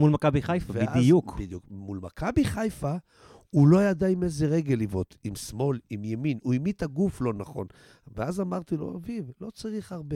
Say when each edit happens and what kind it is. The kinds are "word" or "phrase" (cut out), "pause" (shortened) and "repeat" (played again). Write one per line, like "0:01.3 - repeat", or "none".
none